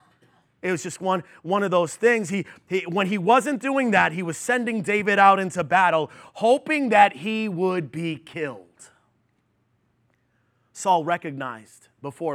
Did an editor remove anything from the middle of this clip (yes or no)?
no